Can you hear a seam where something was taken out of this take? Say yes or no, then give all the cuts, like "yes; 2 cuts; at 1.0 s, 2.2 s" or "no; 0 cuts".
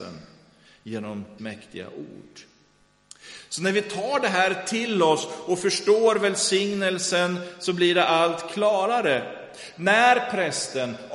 yes; 1 cut; at 1.4 s